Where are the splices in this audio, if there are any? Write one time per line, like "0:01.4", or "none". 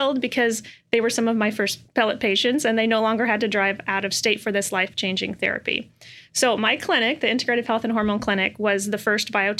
0:01.9